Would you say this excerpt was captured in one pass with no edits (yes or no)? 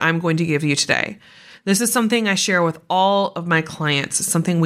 yes